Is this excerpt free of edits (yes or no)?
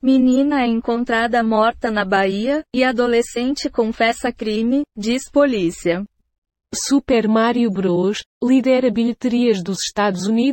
no